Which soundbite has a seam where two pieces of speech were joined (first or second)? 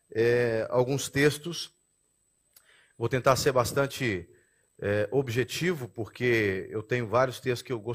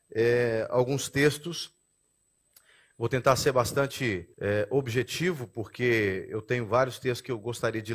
second